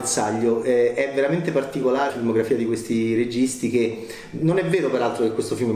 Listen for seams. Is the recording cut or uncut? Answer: cut